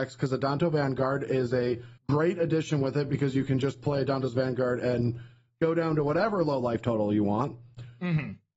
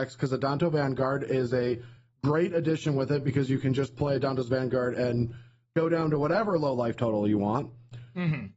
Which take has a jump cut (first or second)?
first